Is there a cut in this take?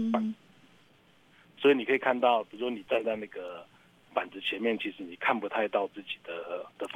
no; 0 cuts

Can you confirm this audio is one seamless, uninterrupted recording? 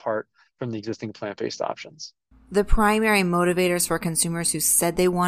no; 1 cut; at 2.3 s

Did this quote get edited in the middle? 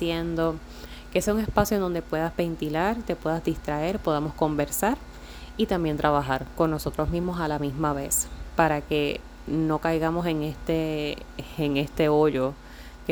no; 0 cuts

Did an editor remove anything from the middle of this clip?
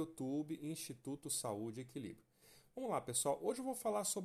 no; 0 cuts

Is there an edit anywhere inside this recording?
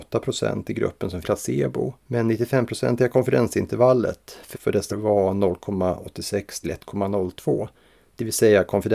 yes; 5 cuts; at 1.2 s, 2.0 s, 4.5 s, 4.9 s, 6.6 s

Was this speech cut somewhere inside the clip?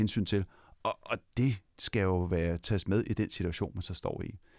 yes; 1 cut; at 1.3 s

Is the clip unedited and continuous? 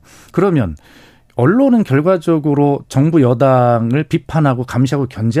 yes; 0 cuts

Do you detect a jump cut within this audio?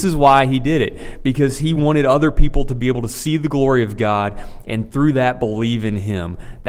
no; 0 cuts

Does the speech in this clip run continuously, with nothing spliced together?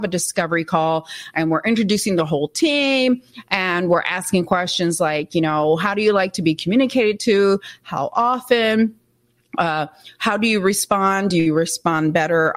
yes; 0 cuts

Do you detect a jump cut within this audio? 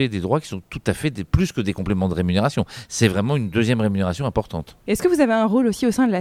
yes; 1 cut; at 4.8 s

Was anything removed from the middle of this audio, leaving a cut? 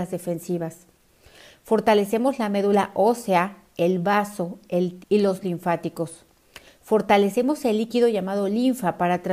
yes; 2 cuts; at 5.0 s, 5.4 s

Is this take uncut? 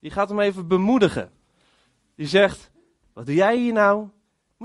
yes; 0 cuts

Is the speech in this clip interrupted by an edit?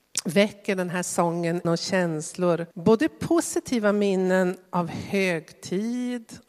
yes; 3 cuts; at 1.6 s, 2.7 s, 4.7 s

